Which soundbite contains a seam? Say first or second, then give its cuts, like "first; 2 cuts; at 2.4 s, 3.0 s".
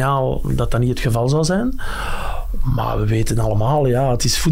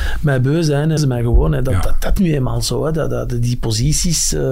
second; 2 cuts; at 1.0 s, 2.2 s